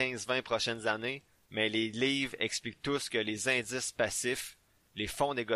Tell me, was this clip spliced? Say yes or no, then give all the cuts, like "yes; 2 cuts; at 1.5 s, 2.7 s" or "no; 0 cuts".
no; 0 cuts